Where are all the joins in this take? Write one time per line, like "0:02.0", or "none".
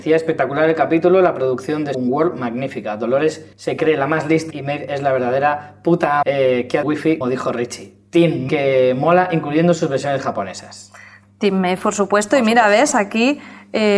0:01.9
0:03.5
0:04.5
0:06.2
0:06.8
0:07.2
0:08.5